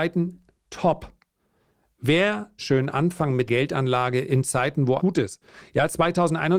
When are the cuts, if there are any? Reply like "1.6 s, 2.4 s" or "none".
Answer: 2.6 s, 3.5 s, 5.0 s